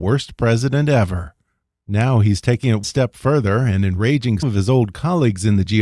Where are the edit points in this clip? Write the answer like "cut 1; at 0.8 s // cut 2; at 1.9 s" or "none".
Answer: cut 1; at 2.8 s // cut 2; at 4.4 s